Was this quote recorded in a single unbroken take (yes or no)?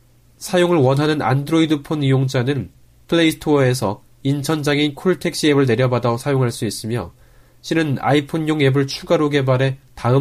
yes